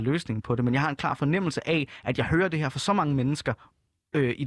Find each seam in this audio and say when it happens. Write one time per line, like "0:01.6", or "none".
none